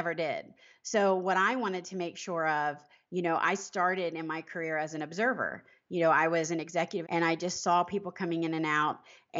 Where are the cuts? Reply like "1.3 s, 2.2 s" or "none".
7.0 s